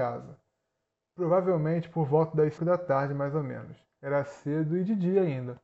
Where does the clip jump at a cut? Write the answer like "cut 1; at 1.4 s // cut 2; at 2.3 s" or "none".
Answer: cut 1; at 2.6 s